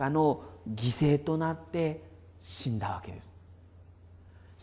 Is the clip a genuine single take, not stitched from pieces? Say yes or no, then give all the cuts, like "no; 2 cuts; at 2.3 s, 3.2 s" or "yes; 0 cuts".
yes; 0 cuts